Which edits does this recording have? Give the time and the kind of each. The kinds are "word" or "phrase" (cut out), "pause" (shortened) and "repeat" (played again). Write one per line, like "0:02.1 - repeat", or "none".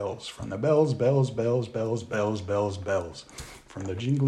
none